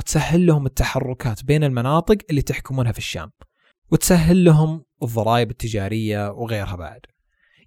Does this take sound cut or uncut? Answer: uncut